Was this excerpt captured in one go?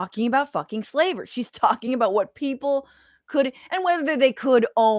yes; 0 cuts

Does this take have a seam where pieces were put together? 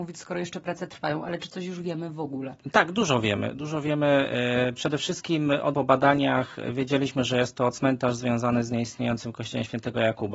yes; 1 cut; at 5.7 s

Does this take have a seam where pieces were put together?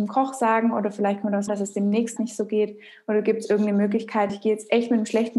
yes; 3 cuts; at 1.5 s, 2.2 s, 4.3 s

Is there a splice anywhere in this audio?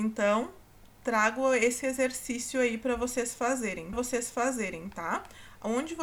yes; 1 cut; at 3.9 s

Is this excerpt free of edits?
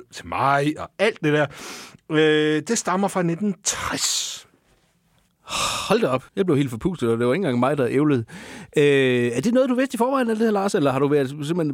no; 1 cut; at 6.3 s

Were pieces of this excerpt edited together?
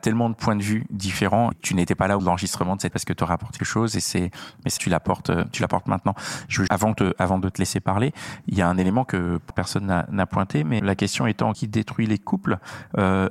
yes; 9 cuts; at 1.5 s, 2.2 s, 2.9 s, 3.6 s, 4.8 s, 6.7 s, 9.5 s, 10.8 s, 11.5 s

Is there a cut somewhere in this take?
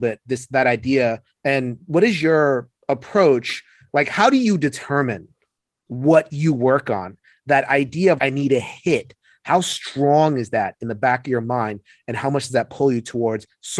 yes; 2 cuts; at 2.8 s, 8.2 s

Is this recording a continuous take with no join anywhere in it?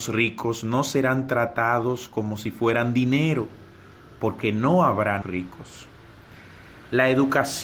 no; 1 cut; at 5.2 s

